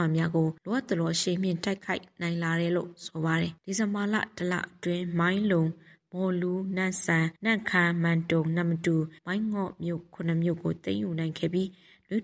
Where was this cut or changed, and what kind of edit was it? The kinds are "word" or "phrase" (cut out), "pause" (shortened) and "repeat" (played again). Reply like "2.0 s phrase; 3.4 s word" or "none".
7.4 s pause; 9.2 s pause